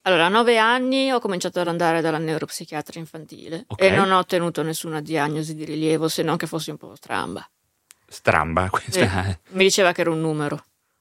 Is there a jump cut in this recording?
no; 0 cuts

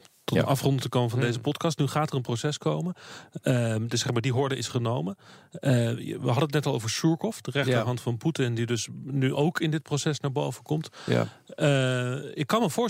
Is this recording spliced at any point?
yes; 1 cut; at 9.3 s

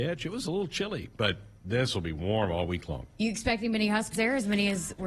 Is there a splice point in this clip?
yes; 1 cut; at 4.1 s

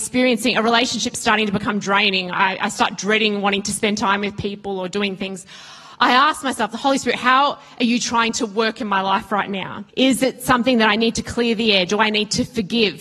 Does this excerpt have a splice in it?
yes; 1 cut; at 9.9 s

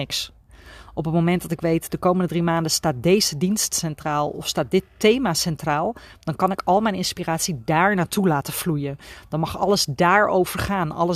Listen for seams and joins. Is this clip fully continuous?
yes; 0 cuts

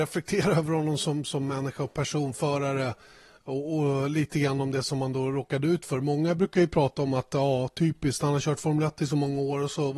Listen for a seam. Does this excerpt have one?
no; 0 cuts

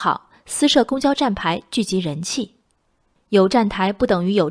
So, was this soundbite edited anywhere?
no; 0 cuts

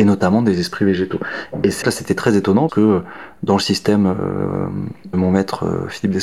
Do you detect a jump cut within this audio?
yes; 3 cuts; at 1.8 s, 2.7 s, 5.1 s

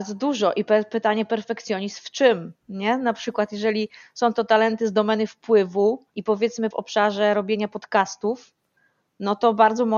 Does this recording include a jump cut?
yes; 3 cuts; at 2.6 s, 6.1 s, 6.7 s

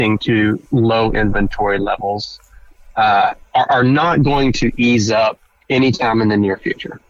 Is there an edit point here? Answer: no; 0 cuts

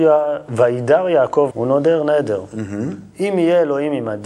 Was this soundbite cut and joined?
yes; 1 cut; at 1.5 s

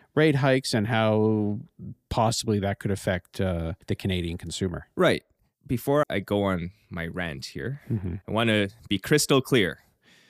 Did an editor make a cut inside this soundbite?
yes; 2 cuts; at 3.8 s, 6.0 s

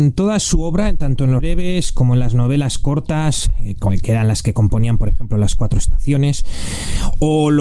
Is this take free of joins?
no; 1 cut; at 1.4 s

